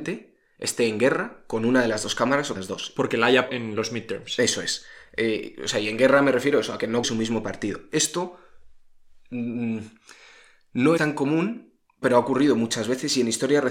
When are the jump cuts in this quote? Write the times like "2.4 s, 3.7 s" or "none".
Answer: 2.6 s, 3.5 s, 7.0 s, 11.0 s, 12.0 s